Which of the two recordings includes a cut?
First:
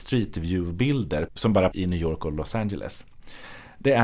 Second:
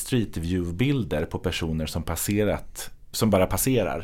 first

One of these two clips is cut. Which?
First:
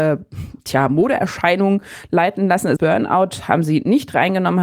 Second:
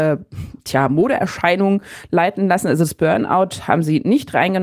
first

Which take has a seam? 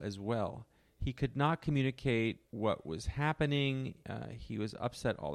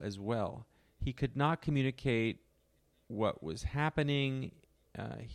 first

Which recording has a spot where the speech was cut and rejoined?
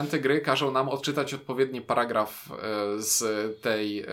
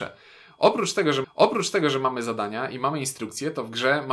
second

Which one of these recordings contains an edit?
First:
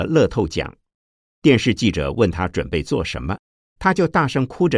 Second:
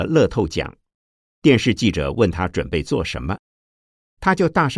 first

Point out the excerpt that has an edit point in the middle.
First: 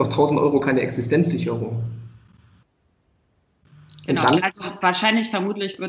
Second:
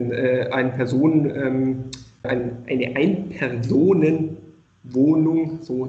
second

